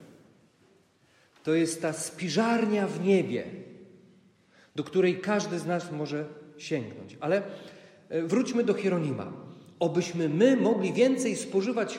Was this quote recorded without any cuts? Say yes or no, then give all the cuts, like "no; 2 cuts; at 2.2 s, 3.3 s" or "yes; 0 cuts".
yes; 0 cuts